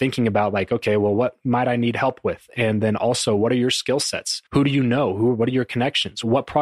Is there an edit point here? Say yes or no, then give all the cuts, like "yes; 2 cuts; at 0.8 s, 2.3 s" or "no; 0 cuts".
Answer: yes; 1 cut; at 4.5 s